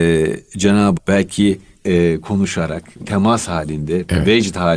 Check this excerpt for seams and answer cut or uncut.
cut